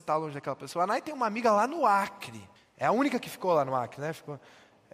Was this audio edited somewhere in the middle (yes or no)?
yes